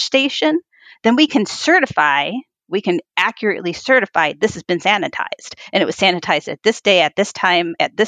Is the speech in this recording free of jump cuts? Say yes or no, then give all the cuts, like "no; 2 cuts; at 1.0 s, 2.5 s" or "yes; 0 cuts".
yes; 0 cuts